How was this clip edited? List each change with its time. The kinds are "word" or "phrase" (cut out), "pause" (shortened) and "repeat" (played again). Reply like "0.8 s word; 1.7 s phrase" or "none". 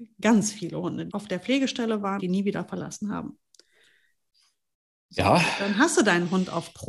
1.1 s word; 2.2 s word